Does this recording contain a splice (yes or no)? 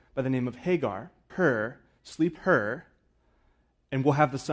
yes